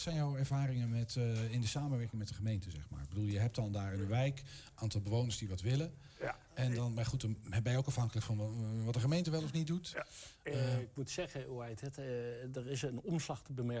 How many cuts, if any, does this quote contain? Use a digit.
0